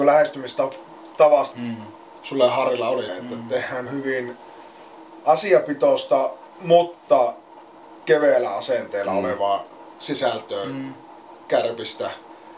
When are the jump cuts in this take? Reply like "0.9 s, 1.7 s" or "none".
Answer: 1.5 s, 3.1 s, 3.9 s, 8.0 s